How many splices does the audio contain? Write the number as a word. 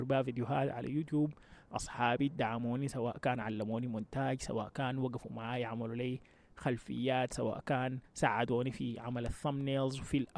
zero